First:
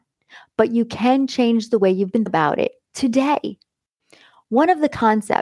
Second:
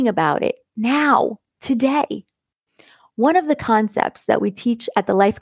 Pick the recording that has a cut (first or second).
first